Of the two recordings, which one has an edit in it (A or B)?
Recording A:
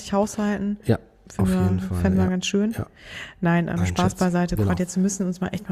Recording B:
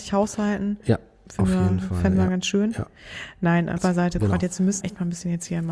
B